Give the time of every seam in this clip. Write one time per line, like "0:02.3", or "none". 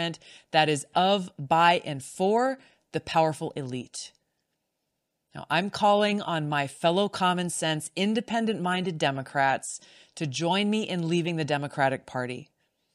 none